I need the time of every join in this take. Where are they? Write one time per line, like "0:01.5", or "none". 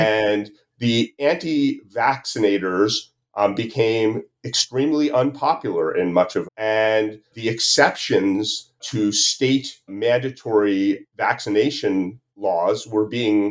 0:06.4
0:07.3
0:08.8
0:09.9